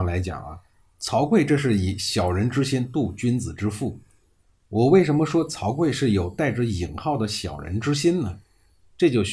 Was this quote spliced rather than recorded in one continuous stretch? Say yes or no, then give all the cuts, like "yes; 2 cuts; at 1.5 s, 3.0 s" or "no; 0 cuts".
no; 0 cuts